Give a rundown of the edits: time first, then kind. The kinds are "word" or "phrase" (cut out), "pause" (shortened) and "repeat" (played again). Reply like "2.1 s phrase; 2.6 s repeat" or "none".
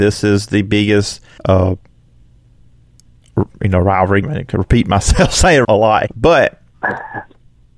1.4 s pause; 4.2 s word; 5.6 s word; 6.1 s word

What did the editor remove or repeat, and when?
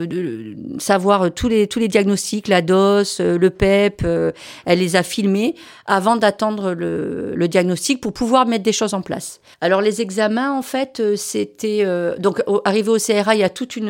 none

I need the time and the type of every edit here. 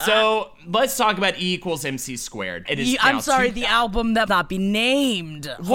2.7 s word; 4.3 s word

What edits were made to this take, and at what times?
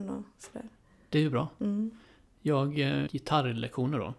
3.1 s word

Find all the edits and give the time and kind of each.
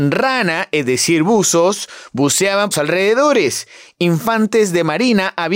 2.7 s phrase

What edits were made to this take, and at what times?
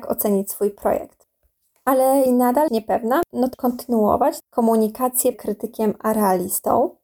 2.3 s word; 2.7 s word; 3.5 s word; 5.3 s word

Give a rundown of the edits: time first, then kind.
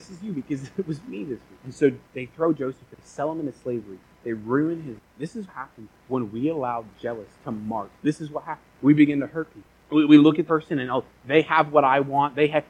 5.5 s word; 7.3 s pause; 8.0 s pause; 8.7 s pause; 10.5 s word

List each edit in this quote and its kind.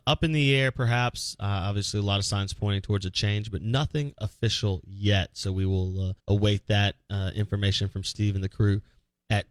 6.2 s pause

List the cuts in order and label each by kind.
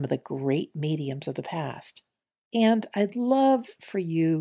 none

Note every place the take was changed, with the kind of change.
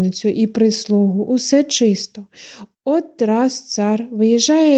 2.7 s pause

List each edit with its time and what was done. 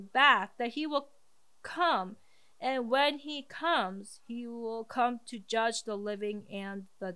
none

